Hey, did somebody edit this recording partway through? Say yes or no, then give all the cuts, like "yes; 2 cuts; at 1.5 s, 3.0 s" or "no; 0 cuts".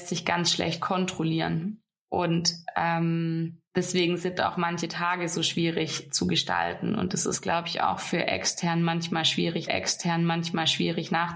yes; 2 cuts; at 3.7 s, 9.7 s